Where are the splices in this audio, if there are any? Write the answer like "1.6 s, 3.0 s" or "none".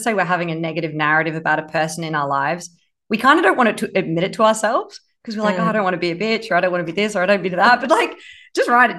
none

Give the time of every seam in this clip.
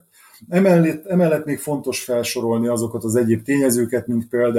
none

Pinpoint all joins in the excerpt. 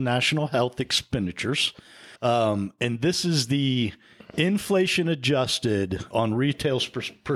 2.2 s, 6.1 s

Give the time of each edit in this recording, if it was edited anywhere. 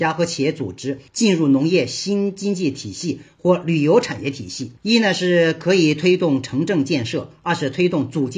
1.1 s, 4.8 s

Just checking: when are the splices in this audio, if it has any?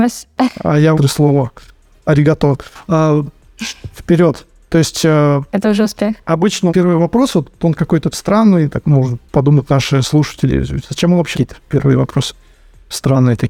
0.9 s, 6.7 s, 8.1 s, 8.8 s, 11.3 s

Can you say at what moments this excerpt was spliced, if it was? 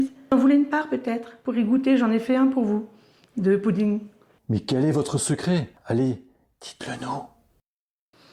none

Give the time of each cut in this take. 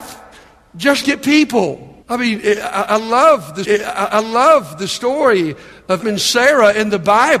1.0 s, 2.0 s, 3.6 s, 6.0 s

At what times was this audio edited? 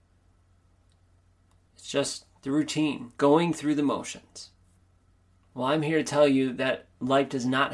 2.4 s, 3.2 s, 4.8 s

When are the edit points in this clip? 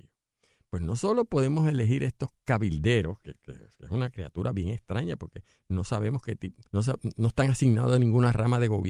6.7 s

